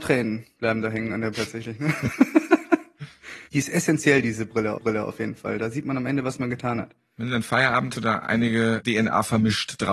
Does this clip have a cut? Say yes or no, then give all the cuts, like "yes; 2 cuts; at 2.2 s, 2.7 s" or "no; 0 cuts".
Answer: yes; 4 cuts; at 1.3 s, 3.5 s, 4.8 s, 7.9 s